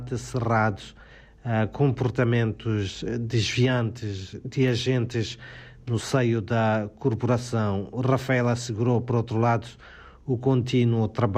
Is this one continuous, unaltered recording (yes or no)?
yes